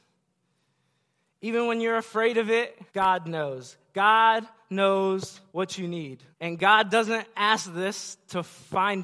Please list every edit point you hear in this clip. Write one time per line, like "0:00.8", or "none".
0:02.9
0:05.5
0:06.3